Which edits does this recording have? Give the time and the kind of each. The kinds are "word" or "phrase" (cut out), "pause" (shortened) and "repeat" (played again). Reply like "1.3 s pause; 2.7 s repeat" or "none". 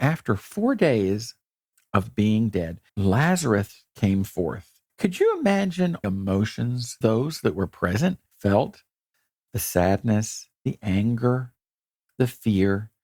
2.9 s pause; 4.9 s pause; 6.0 s phrase; 7.0 s word; 8.3 s pause; 10.6 s pause